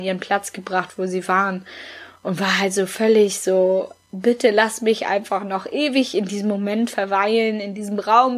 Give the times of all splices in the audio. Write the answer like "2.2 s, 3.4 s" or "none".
none